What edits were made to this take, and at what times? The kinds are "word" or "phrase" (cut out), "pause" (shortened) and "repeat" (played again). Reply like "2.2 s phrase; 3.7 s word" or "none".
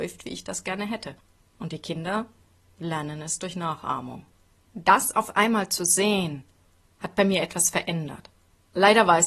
none